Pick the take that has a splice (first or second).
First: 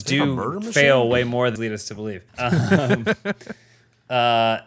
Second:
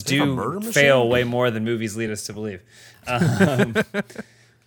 first